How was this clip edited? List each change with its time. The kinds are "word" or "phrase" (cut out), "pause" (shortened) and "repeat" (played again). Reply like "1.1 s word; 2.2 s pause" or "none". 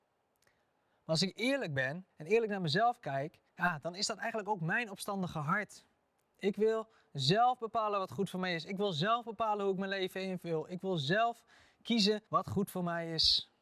2.1 s pause; 3.5 s pause; 12.3 s pause